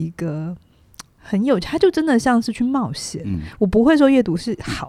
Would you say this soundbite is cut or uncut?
cut